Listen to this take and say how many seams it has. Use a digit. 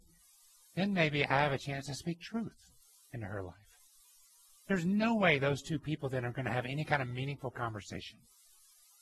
0